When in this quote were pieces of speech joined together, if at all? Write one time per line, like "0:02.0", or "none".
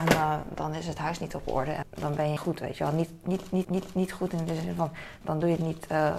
0:01.8
0:02.4
0:03.6
0:05.2